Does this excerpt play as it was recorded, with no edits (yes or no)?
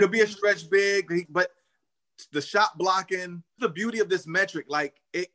no